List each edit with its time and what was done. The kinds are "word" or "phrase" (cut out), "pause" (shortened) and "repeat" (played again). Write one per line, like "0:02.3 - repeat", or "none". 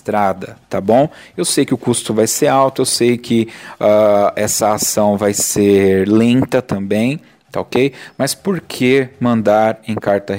none